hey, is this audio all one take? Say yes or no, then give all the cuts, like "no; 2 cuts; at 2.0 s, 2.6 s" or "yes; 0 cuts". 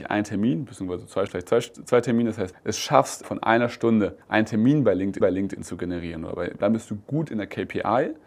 no; 6 cuts; at 1.3 s, 2.5 s, 3.2 s, 4.2 s, 5.2 s, 6.6 s